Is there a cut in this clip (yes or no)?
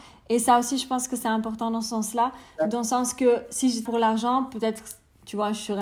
yes